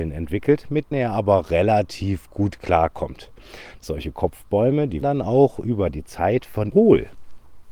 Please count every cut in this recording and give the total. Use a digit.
4